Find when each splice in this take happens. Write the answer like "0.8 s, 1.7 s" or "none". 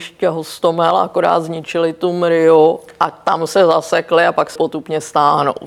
4.6 s